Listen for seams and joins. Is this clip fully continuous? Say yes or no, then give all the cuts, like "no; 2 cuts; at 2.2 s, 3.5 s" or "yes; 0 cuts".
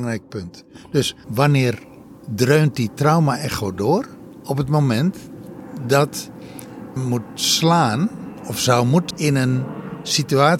no; 3 cuts; at 1.2 s, 7.0 s, 9.1 s